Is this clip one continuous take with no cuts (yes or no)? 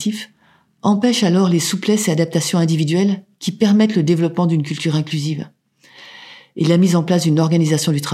yes